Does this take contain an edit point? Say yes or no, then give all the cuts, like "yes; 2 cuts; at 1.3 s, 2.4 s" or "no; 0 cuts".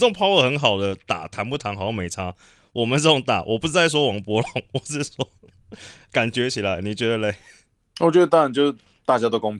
no; 0 cuts